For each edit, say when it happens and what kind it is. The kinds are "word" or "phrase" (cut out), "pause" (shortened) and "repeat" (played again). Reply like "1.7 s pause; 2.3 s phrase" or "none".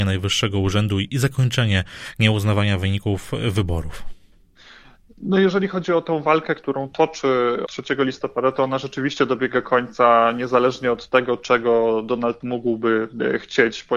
7.7 s word; 12.4 s word